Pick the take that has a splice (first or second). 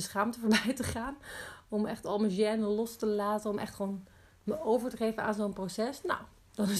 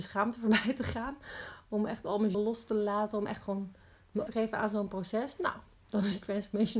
second